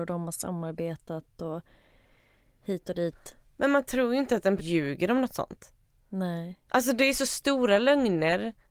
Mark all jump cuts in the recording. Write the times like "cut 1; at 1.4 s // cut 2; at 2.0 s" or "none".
cut 1; at 4.6 s